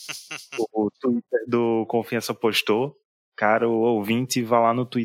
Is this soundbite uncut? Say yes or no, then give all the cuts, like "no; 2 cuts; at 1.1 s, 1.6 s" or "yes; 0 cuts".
yes; 0 cuts